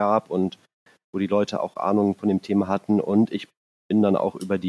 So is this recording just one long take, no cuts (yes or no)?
yes